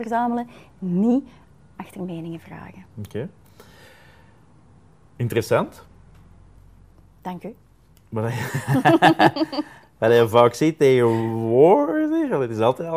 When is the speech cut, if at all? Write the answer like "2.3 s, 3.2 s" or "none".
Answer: none